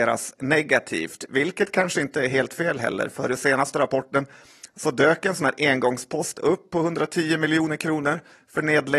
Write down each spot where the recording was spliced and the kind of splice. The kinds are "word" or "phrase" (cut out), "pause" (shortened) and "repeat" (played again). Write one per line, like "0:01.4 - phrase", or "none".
none